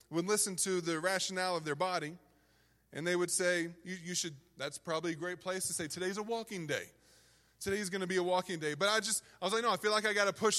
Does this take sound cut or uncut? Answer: uncut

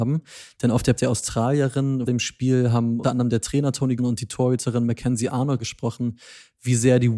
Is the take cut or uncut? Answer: cut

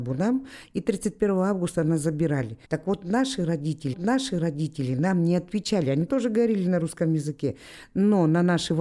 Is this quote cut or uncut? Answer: cut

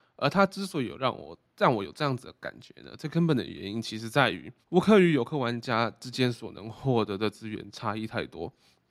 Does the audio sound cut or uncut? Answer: cut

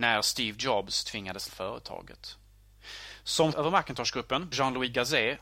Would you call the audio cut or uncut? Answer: cut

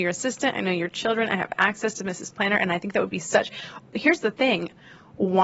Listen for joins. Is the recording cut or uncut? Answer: uncut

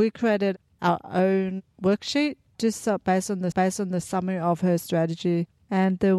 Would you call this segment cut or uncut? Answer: cut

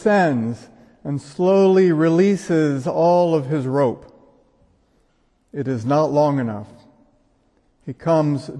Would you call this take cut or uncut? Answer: uncut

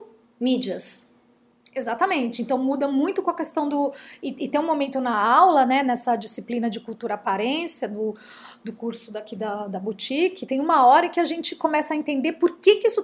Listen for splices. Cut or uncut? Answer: uncut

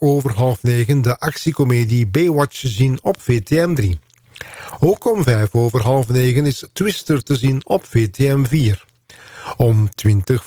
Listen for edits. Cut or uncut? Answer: uncut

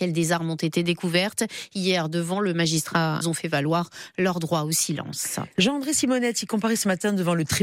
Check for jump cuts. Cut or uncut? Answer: cut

